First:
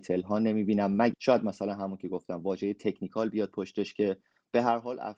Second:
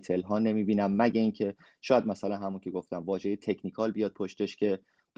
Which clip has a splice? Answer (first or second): first